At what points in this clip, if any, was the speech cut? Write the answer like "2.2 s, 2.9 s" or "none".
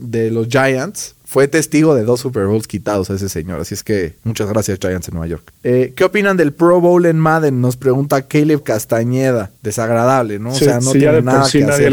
1.2 s, 4.2 s, 5.6 s, 9.6 s